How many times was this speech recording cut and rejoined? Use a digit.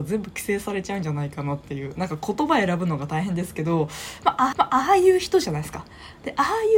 1